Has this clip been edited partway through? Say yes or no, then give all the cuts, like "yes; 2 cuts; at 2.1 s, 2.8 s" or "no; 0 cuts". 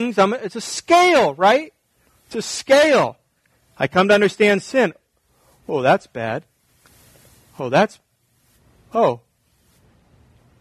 no; 0 cuts